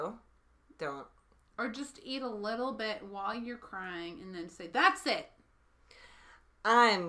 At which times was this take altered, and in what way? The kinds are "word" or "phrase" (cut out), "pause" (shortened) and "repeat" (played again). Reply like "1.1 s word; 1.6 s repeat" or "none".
none